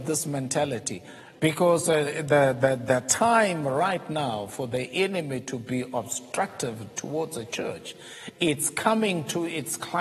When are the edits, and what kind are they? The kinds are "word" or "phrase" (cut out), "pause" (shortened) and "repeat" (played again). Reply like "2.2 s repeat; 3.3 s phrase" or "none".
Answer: none